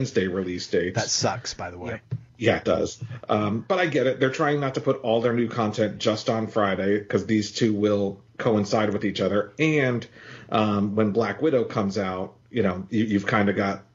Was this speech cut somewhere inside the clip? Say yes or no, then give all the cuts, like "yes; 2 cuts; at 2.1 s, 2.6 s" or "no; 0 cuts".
no; 0 cuts